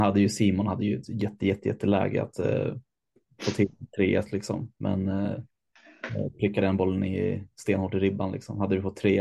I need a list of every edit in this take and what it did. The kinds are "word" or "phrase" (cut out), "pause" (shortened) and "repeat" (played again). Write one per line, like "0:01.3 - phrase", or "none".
none